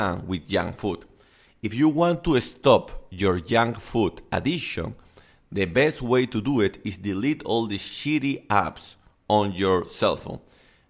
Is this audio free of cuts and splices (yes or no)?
yes